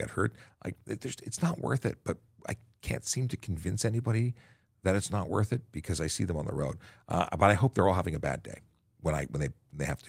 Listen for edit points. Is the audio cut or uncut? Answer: uncut